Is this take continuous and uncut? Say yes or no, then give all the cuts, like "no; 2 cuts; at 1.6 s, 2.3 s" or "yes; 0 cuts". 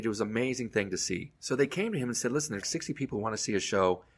no; 2 cuts; at 1.3 s, 2.6 s